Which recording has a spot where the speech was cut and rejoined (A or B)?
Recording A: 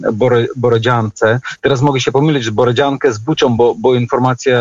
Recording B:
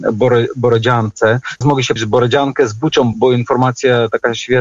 B